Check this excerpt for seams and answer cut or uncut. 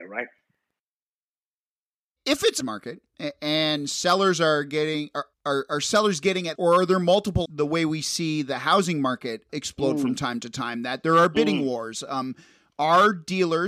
cut